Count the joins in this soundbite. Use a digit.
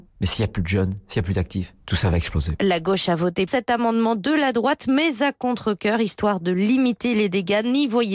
1